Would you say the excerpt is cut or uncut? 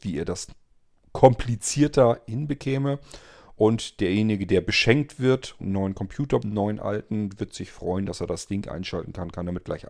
cut